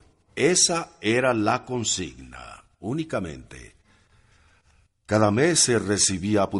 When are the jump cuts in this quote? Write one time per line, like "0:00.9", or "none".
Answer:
none